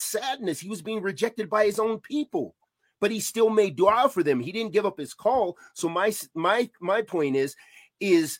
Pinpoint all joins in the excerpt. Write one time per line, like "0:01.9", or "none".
none